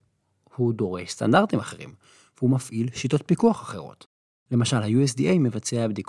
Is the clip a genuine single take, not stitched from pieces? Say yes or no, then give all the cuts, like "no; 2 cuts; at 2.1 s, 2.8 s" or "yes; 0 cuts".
yes; 0 cuts